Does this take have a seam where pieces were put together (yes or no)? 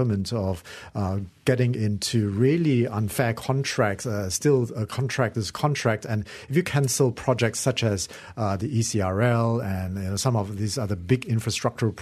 no